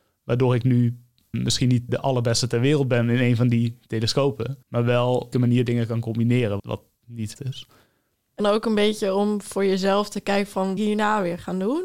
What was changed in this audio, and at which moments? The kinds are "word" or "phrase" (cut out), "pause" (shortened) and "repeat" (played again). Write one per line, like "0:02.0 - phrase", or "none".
0:01.3 - word
0:01.9 - word
0:04.6 - pause
0:05.3 - phrase
0:06.6 - word
0:07.3 - phrase
0:08.4 - phrase
0:10.8 - phrase